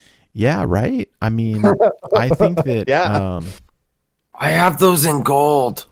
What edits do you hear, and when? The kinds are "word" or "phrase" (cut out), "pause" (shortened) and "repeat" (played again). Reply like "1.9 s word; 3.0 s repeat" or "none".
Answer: none

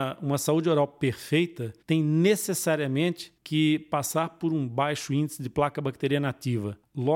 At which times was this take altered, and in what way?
1.8 s pause; 3.4 s pause

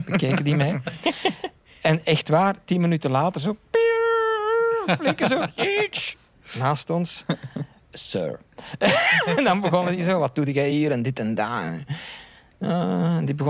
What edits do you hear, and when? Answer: none

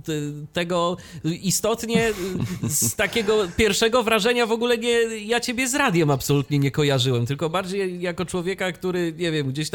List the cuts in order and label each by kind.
none

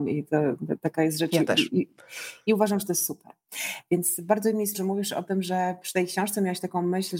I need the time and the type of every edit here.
4.7 s word

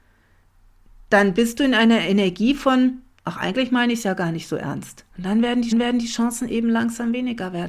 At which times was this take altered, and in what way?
5.1 s pause; 5.7 s repeat

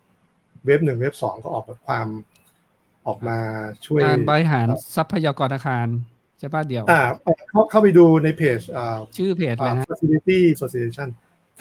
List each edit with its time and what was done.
9.8 s word; 10.5 s word

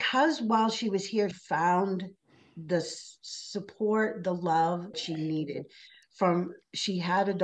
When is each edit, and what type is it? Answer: 1.3 s word; 4.9 s phrase

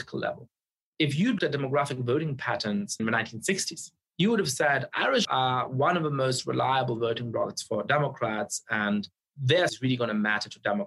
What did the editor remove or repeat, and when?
1.4 s word; 3.0 s word; 5.2 s word; 9.7 s word

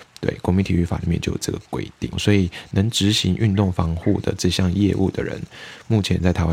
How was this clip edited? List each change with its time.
2.1 s word

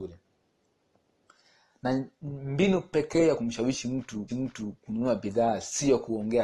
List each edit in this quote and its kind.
3.4 s phrase; 4.3 s repeat

